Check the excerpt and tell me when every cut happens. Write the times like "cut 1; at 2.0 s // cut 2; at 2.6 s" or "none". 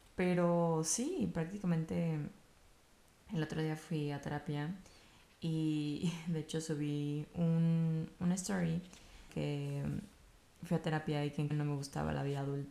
cut 1; at 9.3 s // cut 2; at 11.5 s